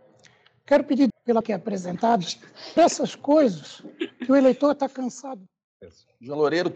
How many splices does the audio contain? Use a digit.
3